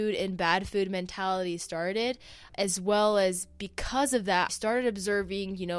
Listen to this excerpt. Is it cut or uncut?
cut